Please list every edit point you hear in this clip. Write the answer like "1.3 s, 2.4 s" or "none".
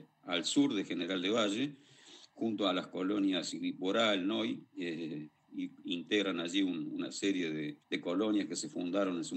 7.8 s